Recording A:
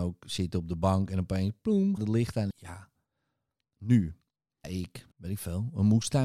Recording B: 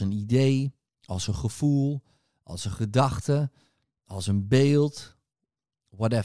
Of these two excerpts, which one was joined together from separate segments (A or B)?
A